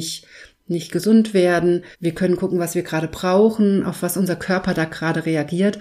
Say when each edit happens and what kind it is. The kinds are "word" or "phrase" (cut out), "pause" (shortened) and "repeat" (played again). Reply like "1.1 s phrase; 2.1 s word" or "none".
1.9 s pause